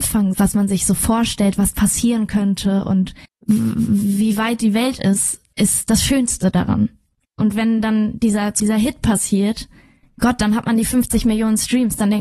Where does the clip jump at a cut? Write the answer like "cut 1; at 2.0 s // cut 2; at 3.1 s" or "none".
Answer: cut 1; at 3.2 s // cut 2; at 8.6 s